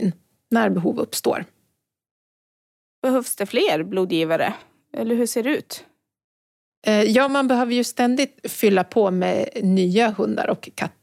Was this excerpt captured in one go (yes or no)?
yes